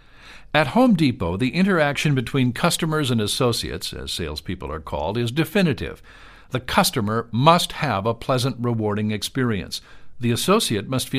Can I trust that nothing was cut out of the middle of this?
yes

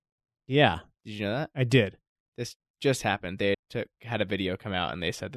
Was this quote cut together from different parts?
yes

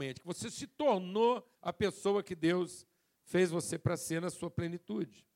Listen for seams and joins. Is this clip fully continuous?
no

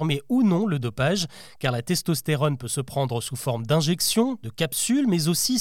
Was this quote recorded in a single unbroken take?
yes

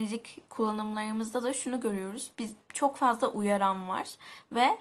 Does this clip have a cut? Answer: no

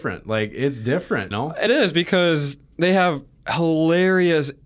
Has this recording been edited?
yes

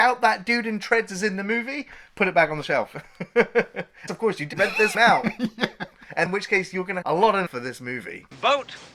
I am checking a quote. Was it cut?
yes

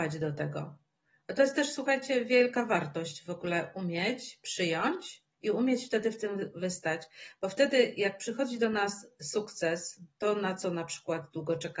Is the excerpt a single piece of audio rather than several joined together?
no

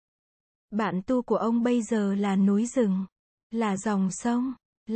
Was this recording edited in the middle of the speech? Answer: no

